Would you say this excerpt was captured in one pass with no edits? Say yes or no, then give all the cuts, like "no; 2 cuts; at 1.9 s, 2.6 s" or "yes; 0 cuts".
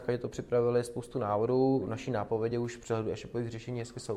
yes; 0 cuts